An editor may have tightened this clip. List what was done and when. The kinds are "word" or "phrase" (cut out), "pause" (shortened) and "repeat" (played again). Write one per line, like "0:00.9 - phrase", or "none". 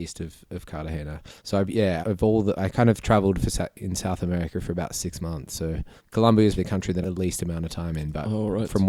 0:01.4 - pause
0:02.0 - word
0:06.0 - pause
0:06.6 - word
0:07.0 - phrase